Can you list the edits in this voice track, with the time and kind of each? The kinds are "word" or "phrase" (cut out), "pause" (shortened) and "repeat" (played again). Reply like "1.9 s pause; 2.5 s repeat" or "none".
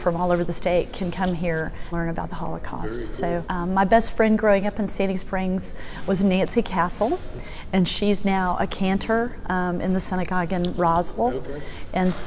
1.9 s word; 3.4 s word